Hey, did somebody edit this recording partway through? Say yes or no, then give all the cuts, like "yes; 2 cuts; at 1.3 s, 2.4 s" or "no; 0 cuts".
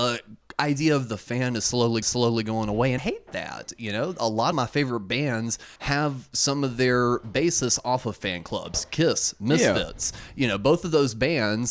yes; 4 cuts; at 2.0 s, 3.0 s, 4.5 s, 5.8 s